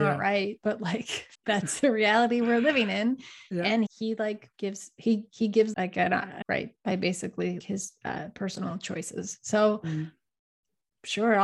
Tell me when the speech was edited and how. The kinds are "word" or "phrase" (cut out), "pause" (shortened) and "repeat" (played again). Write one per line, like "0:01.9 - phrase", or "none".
0:01.3 - pause
0:03.9 - word
0:04.5 - pause
0:05.7 - phrase
0:06.4 - word
0:07.6 - word